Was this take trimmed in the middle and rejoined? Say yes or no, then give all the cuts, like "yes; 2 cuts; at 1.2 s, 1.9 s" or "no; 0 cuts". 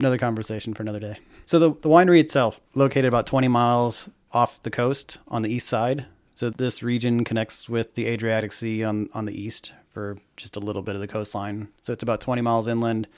yes; 2 cuts; at 2.7 s, 6.5 s